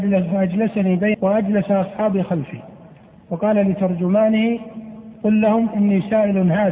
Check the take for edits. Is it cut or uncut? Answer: cut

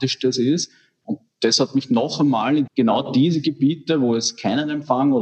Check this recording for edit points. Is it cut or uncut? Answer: cut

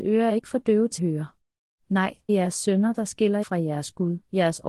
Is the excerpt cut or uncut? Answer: cut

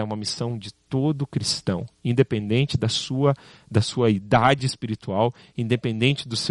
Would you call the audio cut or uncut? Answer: uncut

